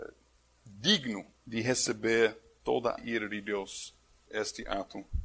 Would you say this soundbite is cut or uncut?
cut